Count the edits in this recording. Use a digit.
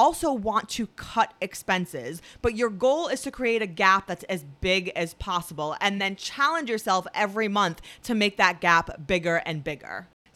0